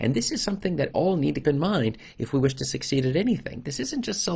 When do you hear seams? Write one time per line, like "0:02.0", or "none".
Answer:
0:00.9
0:01.4